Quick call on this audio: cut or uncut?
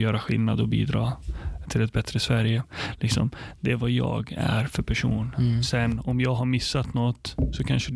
cut